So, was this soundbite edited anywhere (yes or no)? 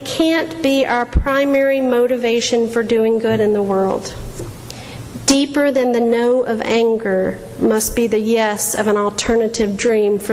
no